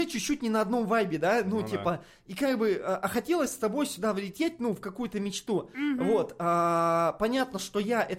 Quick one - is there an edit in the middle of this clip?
no; 0 cuts

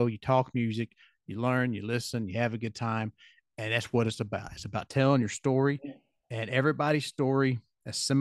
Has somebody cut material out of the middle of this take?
no; 0 cuts

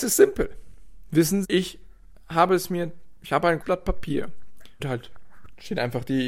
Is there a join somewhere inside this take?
yes; 3 cuts; at 1.4 s, 3.6 s, 4.8 s

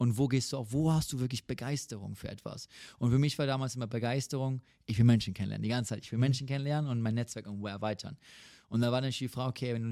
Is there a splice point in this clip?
no; 0 cuts

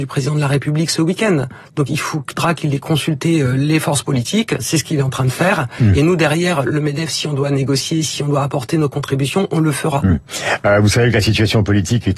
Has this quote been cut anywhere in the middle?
no; 0 cuts

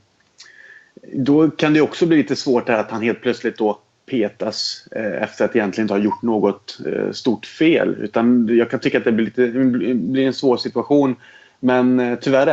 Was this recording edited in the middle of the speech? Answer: no; 0 cuts

